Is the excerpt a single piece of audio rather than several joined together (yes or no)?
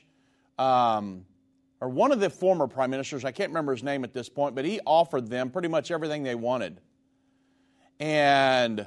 yes